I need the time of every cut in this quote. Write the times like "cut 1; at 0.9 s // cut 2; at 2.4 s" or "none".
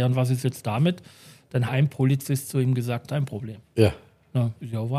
cut 1; at 1.7 s // cut 2; at 3.1 s